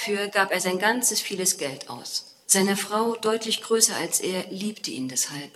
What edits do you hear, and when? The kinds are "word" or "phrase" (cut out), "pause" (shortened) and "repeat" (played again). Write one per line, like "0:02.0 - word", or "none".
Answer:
0:02.4 - pause